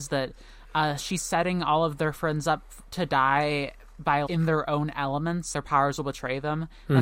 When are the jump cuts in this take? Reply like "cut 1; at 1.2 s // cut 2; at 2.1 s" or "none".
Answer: cut 1; at 4.3 s // cut 2; at 5.5 s